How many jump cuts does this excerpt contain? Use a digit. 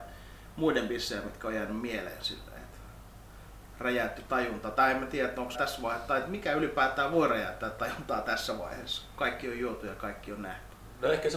1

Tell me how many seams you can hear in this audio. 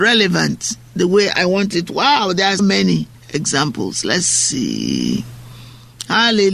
2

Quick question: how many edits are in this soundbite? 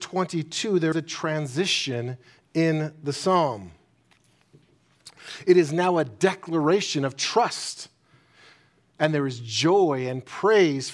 1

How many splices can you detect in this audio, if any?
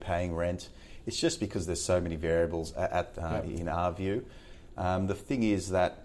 1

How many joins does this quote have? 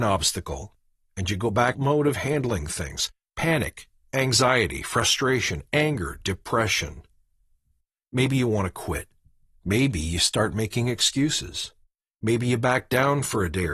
1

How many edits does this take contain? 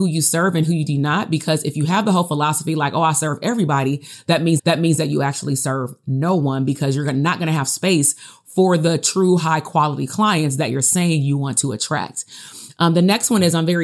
1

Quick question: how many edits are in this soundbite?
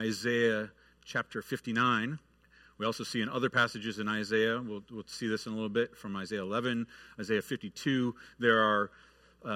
1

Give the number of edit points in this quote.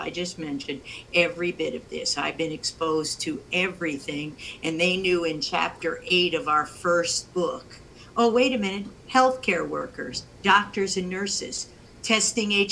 0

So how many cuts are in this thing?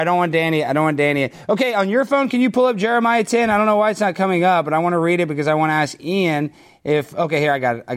0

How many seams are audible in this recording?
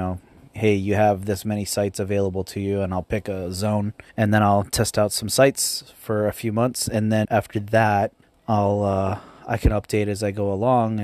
3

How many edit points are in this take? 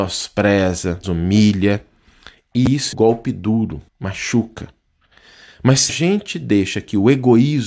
4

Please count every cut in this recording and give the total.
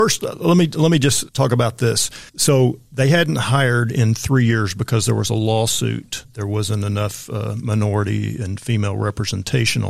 2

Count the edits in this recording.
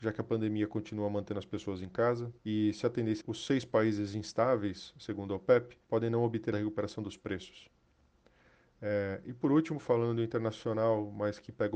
4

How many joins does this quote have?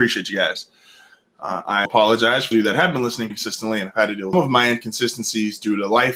4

